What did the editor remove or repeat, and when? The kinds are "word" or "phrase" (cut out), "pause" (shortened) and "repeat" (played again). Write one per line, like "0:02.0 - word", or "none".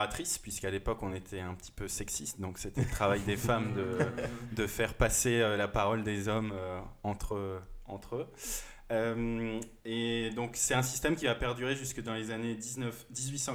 none